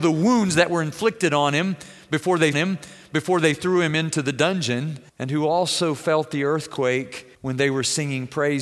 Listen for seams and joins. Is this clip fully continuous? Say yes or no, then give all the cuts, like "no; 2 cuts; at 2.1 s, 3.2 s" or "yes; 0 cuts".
no; 3 cuts; at 2.5 s, 5.1 s, 7.3 s